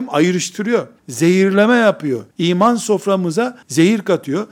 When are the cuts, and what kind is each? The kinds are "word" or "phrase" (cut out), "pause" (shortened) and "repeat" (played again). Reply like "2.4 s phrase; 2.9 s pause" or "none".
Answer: 1.0 s pause; 2.3 s pause; 3.6 s pause